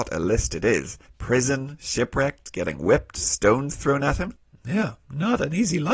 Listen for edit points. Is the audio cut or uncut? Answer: uncut